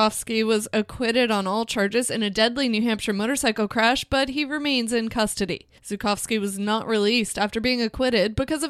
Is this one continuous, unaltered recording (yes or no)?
no